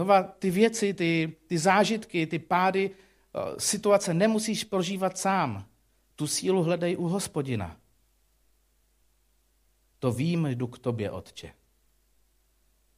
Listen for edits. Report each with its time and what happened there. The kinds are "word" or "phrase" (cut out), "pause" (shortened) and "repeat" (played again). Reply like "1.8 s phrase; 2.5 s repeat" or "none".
none